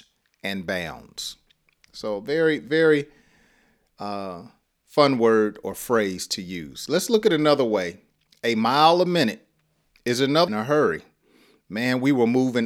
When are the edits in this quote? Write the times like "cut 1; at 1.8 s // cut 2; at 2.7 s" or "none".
cut 1; at 10.5 s

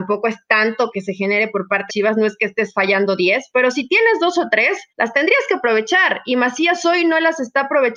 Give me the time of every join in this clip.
cut 1; at 0.9 s // cut 2; at 1.9 s // cut 3; at 4.9 s

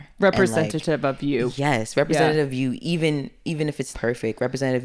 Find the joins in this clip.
cut 1; at 3.9 s

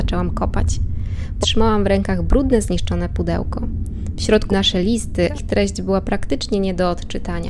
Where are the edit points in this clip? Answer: cut 1; at 1.4 s // cut 2; at 4.5 s // cut 3; at 5.3 s

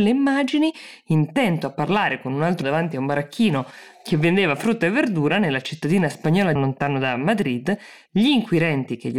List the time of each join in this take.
cut 1; at 2.6 s // cut 2; at 6.6 s

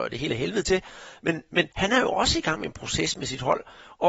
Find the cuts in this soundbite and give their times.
cut 1; at 1.7 s

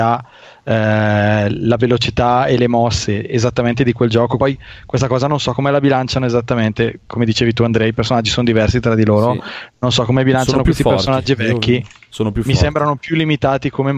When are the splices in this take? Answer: cut 1; at 4.4 s

